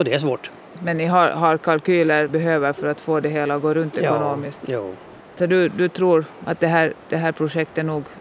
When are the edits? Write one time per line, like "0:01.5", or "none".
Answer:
0:02.3